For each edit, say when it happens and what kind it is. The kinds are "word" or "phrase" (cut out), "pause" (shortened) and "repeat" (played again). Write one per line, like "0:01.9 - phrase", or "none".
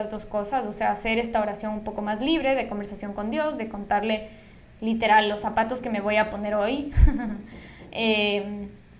none